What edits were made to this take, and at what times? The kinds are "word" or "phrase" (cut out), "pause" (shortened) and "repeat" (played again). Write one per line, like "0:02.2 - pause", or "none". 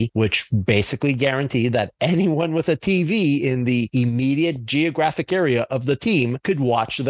none